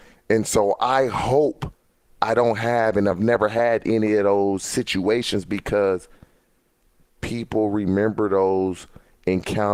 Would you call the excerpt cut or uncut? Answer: uncut